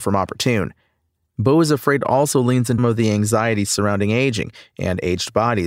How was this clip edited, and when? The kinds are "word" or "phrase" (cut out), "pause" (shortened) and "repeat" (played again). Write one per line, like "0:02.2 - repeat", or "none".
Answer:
0:02.8 - word